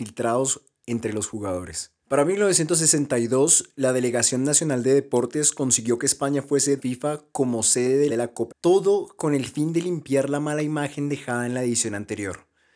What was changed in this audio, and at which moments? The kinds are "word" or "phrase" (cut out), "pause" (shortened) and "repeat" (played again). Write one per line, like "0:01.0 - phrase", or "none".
0:02.0 - pause
0:06.8 - phrase
0:08.1 - phrase
0:08.5 - phrase

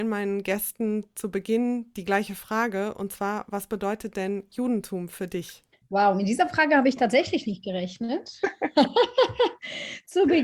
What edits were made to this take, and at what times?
none

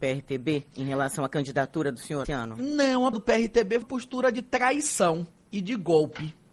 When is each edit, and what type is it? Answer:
0:02.2 - word
0:03.1 - word
0:03.8 - word

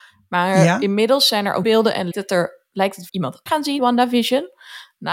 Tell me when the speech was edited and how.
0:01.6 - word
0:02.1 - word
0:03.1 - phrase
0:03.5 - word
0:03.8 - word

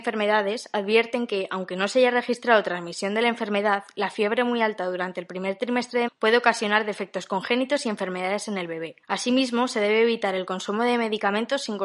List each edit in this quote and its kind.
0:06.1 - word
0:09.0 - pause

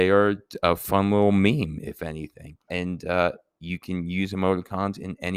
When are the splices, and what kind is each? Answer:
0:02.7 - word

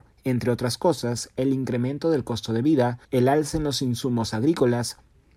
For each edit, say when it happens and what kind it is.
0:03.0 - pause

